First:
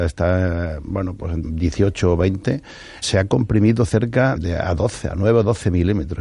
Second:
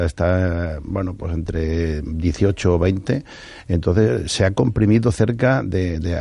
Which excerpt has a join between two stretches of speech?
first; 3 cuts; at 1.4 s, 3.0 s, 4.4 s

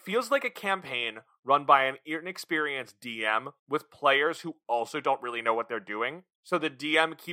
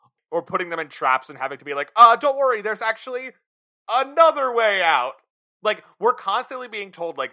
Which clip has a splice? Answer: first; 2 cuts; at 3.6 s, 6.3 s

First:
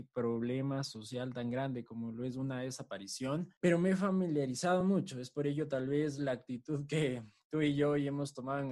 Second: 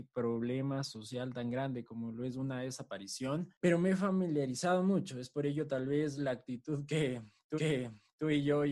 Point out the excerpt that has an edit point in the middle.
second; 1 cut; at 7.6 s

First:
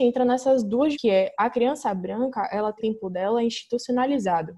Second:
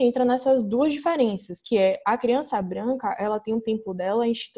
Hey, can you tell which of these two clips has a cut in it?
first; 2 cuts; at 0.9 s, 2.8 s

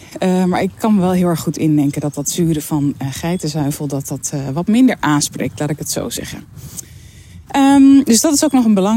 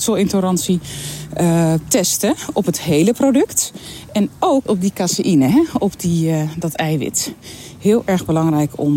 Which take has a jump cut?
second; 1 cut; at 4.7 s

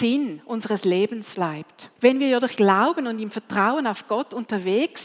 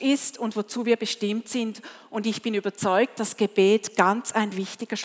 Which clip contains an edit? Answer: first; 3 cuts; at 1.3 s, 2.0 s, 2.6 s

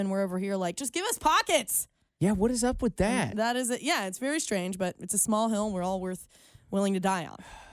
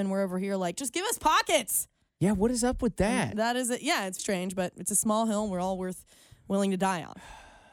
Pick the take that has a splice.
second; 1 cut; at 4.2 s

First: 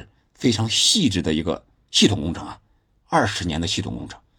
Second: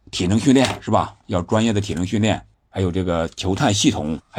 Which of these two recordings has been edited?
second; 1 cut; at 2.5 s

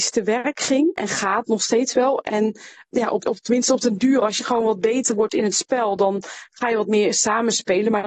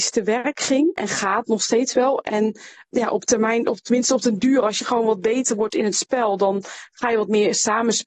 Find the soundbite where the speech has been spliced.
first; 1 cut; at 3.2 s

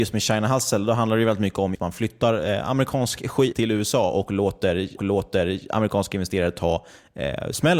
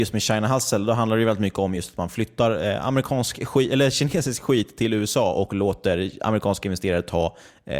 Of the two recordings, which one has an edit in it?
first; 3 cuts; at 1.7 s, 3.5 s, 5.0 s

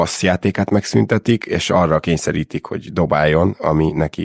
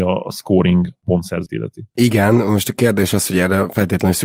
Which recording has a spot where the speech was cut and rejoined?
second; 1 cut; at 1.5 s

